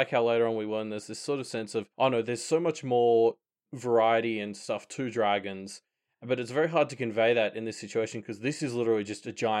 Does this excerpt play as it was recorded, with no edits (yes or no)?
no